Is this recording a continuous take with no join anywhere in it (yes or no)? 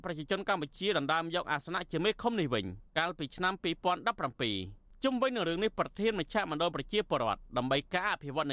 no